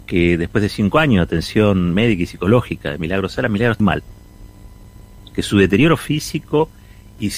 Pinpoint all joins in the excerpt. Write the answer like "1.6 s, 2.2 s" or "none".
3.8 s